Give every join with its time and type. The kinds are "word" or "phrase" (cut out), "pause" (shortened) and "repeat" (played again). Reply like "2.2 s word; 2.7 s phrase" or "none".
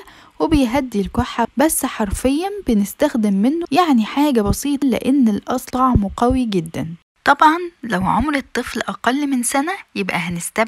1.4 s word; 3.6 s word; 4.8 s word; 5.7 s word